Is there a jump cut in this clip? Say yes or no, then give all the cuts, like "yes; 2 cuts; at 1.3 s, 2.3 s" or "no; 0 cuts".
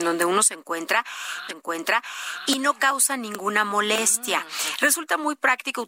yes; 1 cut; at 1.5 s